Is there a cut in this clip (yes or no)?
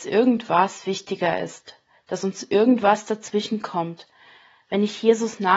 no